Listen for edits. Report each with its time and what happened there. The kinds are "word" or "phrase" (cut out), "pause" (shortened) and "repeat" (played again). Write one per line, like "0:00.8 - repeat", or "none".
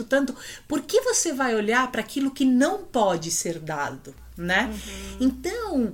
none